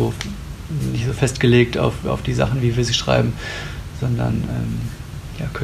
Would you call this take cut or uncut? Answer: uncut